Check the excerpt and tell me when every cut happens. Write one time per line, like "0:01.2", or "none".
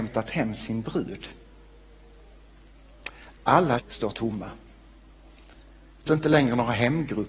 0:03.8
0:04.1
0:06.1